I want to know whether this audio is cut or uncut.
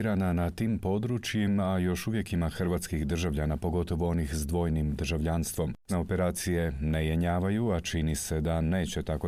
cut